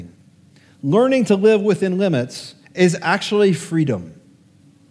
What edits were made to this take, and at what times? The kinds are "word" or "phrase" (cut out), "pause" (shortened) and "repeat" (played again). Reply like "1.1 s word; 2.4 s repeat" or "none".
2.6 s pause